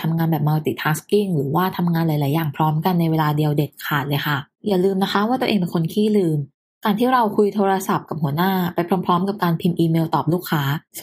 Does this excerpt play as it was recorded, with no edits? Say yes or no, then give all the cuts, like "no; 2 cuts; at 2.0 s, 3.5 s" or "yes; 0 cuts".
yes; 0 cuts